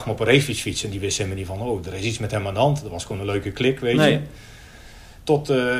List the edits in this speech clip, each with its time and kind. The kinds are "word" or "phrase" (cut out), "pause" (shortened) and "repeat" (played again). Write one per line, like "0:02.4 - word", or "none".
none